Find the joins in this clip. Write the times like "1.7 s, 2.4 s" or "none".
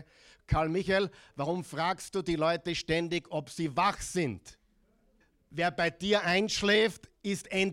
5.2 s